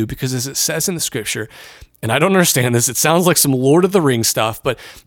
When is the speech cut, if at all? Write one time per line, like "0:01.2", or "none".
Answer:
none